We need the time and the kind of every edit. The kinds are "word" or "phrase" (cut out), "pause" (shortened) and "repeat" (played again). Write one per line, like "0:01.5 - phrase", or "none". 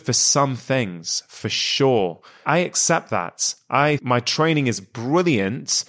0:04.0 - word